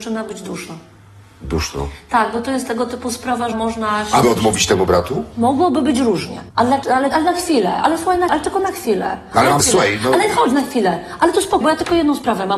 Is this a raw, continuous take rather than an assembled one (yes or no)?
no